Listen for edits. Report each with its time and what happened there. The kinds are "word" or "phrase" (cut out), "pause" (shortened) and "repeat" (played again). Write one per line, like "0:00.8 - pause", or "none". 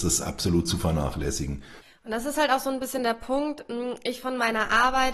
none